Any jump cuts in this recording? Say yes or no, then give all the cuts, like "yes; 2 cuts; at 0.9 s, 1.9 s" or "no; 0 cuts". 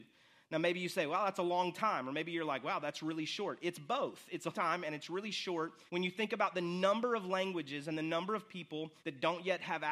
yes; 3 cuts; at 4.5 s, 5.9 s, 9.0 s